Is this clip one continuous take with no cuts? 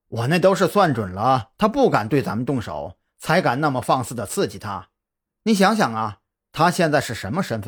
yes; 0 cuts

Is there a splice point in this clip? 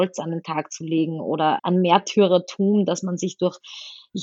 yes; 1 cut; at 1.6 s

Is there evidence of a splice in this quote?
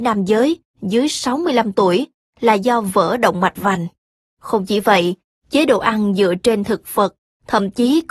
yes; 1 cut; at 4.2 s

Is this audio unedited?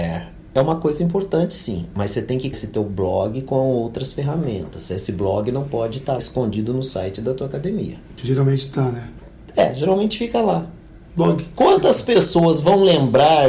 no; 4 cuts; at 2.5 s, 6.2 s, 8.1 s, 11.0 s

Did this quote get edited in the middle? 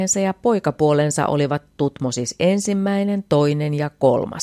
no; 0 cuts

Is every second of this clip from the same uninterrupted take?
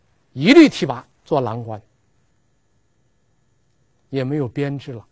no; 1 cut; at 1.1 s

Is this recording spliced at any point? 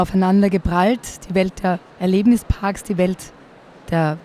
yes; 1 cut; at 1.9 s

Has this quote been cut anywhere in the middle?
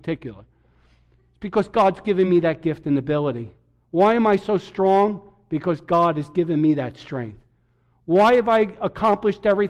no; 0 cuts

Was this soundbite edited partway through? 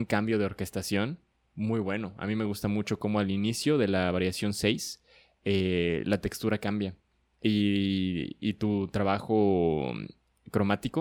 no; 0 cuts

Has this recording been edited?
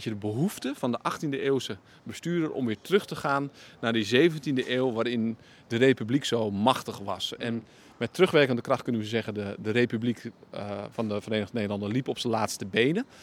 no; 0 cuts

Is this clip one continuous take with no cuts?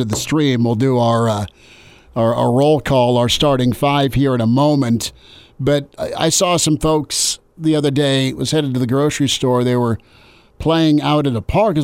yes; 0 cuts

